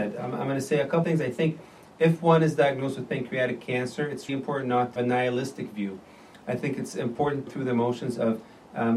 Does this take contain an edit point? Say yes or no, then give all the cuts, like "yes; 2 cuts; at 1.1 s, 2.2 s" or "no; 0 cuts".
yes; 4 cuts; at 1.0 s, 4.3 s, 5.0 s, 7.5 s